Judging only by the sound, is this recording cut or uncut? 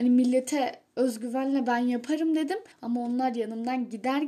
cut